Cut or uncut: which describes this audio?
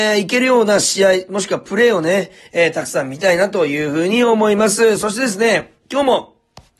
uncut